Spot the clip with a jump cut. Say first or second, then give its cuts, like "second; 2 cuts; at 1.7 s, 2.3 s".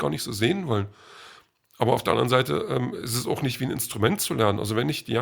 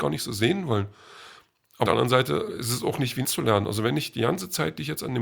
second; 3 cuts; at 1.9 s, 2.5 s, 3.2 s